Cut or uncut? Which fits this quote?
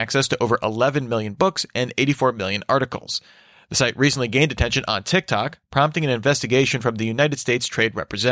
uncut